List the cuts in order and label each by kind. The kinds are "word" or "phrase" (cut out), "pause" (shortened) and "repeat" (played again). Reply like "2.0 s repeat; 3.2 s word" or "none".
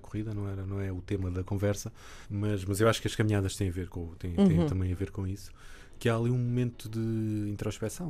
2.2 s pause